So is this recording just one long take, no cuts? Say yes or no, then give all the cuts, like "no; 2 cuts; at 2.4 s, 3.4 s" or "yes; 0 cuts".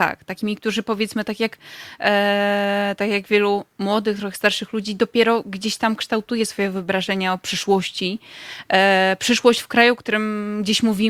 yes; 0 cuts